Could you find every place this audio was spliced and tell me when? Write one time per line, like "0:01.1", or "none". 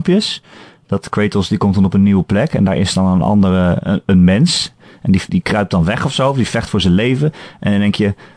0:05.3